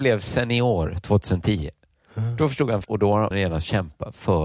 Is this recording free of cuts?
no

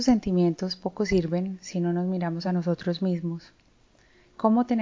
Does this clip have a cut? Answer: no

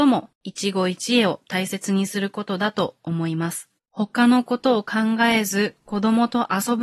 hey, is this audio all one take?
no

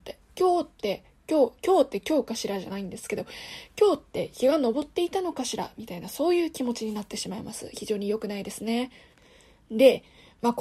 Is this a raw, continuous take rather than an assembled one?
no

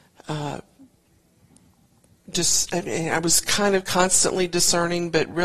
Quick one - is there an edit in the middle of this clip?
no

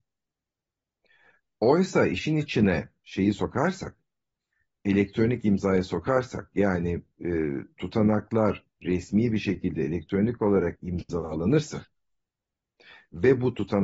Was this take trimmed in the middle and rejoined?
no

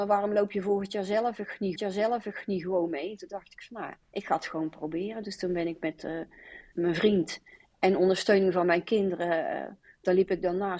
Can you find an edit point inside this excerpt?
yes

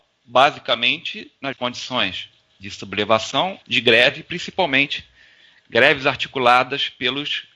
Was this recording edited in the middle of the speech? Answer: yes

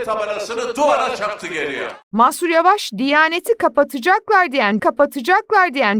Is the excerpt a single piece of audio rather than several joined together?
no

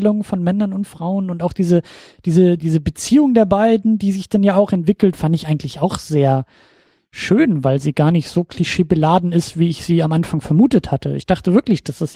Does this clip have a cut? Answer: yes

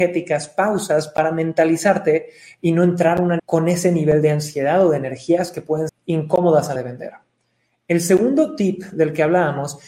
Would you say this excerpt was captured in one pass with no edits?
no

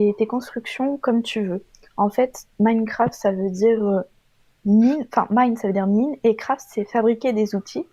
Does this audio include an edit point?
no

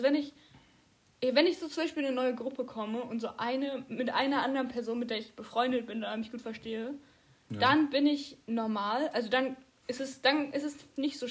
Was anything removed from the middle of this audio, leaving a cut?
no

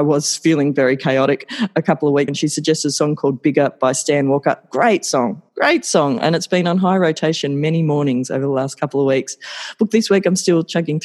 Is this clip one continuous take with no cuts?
no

